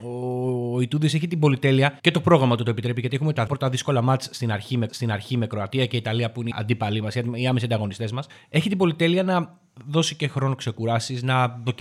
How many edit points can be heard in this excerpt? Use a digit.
5